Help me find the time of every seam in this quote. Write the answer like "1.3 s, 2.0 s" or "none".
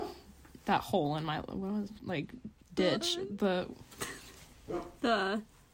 2.0 s, 2.6 s